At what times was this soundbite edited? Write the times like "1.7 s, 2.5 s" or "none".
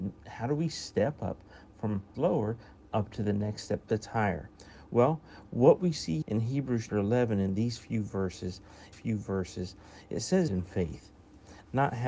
2.1 s, 6.2 s, 6.9 s, 8.9 s, 10.5 s

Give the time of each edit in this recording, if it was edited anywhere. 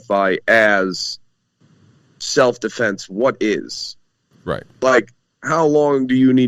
none

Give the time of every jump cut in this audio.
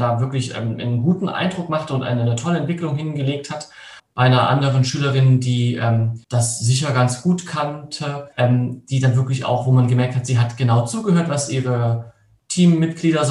4.0 s, 6.2 s, 8.3 s

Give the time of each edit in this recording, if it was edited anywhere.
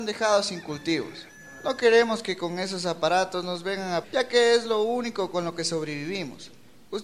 4.0 s

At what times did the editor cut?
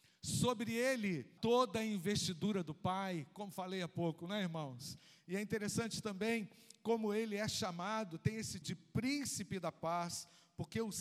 1.4 s, 8.6 s

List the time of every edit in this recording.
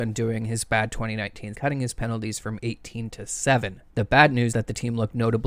1.5 s, 3.9 s, 4.5 s

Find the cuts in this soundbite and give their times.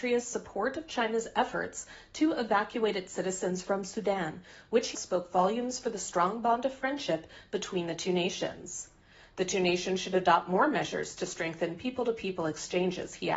4.9 s

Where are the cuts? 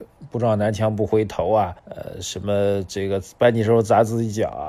1.8 s

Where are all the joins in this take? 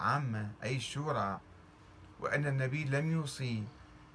none

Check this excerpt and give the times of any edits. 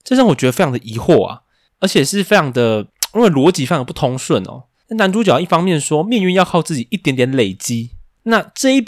none

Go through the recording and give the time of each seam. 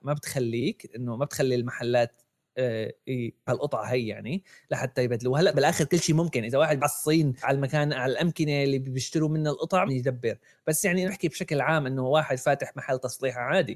3.5 s, 5.5 s, 6.8 s, 7.4 s, 9.9 s, 11.1 s

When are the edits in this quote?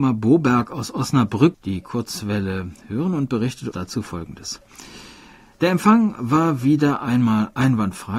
1.5 s, 3.7 s

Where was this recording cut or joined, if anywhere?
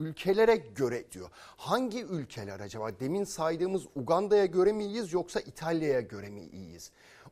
1.1 s

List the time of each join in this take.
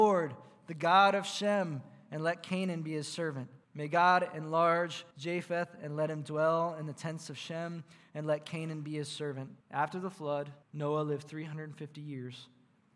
3.6 s, 5.1 s, 9.6 s, 10.6 s

